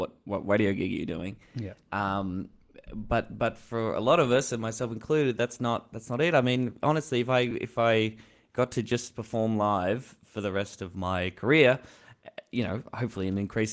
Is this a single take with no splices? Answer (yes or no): yes